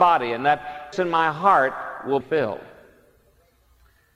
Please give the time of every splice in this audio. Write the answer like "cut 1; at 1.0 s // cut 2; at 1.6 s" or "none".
cut 1; at 0.9 s // cut 2; at 2.2 s